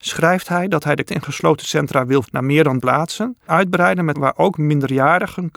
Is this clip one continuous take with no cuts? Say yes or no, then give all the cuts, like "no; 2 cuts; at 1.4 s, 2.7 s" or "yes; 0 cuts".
no; 5 cuts; at 1.1 s, 2.2 s, 2.8 s, 3.5 s, 4.1 s